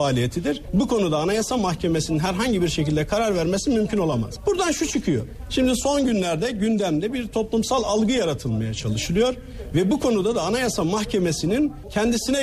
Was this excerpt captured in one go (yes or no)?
yes